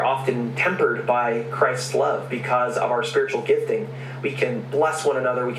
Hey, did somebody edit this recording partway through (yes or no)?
no